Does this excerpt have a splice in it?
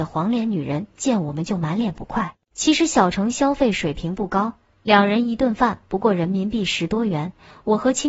yes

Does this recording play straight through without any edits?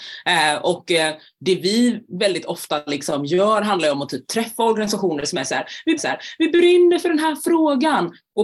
no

